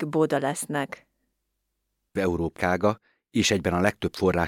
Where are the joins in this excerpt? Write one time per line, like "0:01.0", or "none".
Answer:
0:02.2
0:02.6

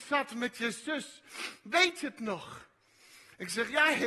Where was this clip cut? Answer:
none

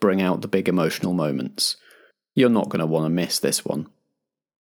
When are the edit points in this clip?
none

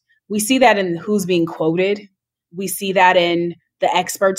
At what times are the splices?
none

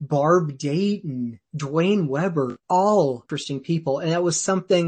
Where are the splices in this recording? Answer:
0:03.2

